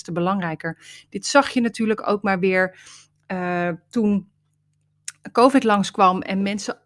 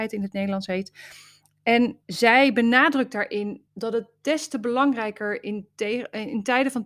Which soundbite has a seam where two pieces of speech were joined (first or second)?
second